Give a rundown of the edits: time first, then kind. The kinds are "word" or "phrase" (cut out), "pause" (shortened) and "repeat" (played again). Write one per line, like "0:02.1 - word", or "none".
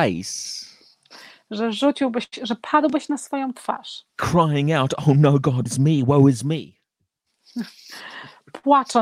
0:04.1 - pause
0:05.7 - word